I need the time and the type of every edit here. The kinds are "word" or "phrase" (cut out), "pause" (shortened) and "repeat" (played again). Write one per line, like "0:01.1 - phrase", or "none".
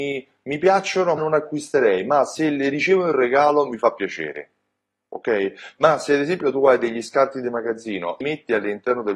0:01.2 - word
0:08.2 - word